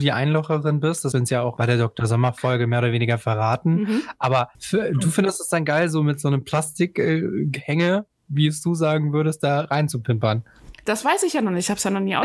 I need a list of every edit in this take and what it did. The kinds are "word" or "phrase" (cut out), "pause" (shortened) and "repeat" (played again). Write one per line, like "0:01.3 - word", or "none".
0:01.1 - word
0:04.5 - pause